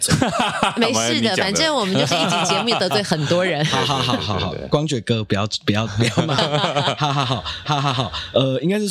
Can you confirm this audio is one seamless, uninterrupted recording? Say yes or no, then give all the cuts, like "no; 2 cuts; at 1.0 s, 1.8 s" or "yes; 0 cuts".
no; 1 cut; at 7.6 s